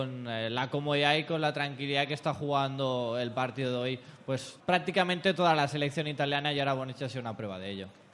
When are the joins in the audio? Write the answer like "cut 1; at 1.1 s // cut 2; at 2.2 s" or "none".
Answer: cut 1; at 4.6 s